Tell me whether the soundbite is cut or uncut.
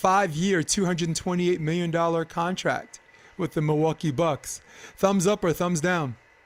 uncut